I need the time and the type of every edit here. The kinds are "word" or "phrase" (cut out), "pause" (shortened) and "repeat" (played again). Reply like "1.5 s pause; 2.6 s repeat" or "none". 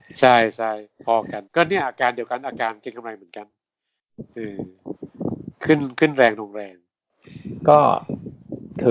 1.5 s pause